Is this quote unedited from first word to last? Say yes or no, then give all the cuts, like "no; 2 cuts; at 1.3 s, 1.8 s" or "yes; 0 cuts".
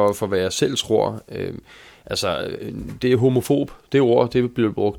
yes; 0 cuts